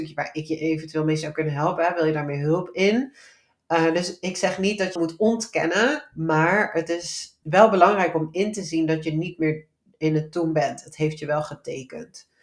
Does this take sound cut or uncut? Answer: cut